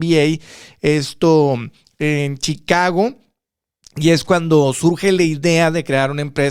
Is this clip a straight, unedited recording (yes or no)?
yes